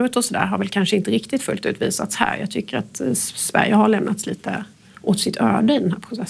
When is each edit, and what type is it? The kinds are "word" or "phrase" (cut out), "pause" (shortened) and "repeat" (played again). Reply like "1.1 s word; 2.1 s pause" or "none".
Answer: none